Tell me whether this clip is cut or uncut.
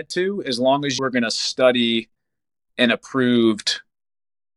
cut